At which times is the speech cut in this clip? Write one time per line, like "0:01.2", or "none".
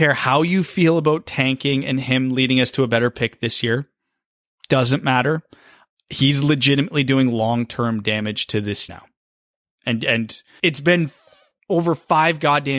0:08.9
0:10.6